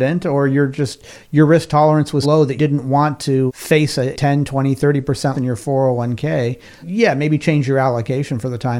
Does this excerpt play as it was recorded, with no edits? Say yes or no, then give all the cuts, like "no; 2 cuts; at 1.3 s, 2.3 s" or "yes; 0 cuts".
no; 6 cuts; at 2.2 s, 2.6 s, 3.5 s, 4.1 s, 5.3 s, 6.8 s